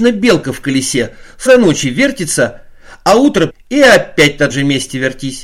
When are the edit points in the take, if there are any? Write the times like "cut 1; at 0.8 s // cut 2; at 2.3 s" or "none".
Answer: cut 1; at 1.5 s // cut 2; at 3.5 s // cut 3; at 4.5 s